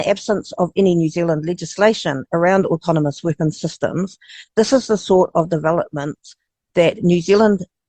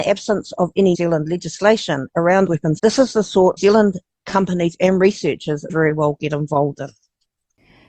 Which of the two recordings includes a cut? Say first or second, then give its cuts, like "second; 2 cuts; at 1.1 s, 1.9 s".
second; 5 cuts; at 0.9 s, 2.5 s, 2.8 s, 3.6 s, 5.7 s